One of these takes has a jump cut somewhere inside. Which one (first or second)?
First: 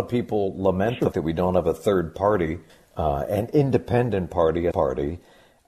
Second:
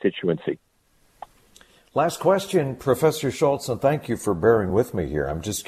first